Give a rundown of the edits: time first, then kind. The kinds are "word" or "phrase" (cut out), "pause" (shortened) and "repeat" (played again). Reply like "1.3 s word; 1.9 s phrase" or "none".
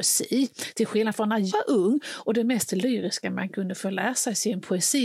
1.5 s word